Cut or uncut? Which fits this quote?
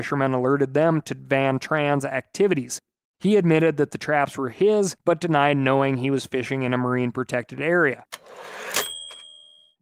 uncut